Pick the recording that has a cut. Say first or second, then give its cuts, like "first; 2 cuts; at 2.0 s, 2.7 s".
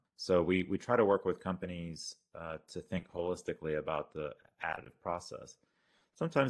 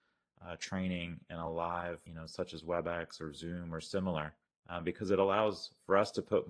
second; 2 cuts; at 2.1 s, 4.5 s